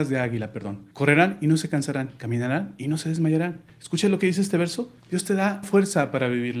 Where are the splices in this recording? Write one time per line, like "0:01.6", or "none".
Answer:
0:00.9
0:03.7
0:05.0
0:05.6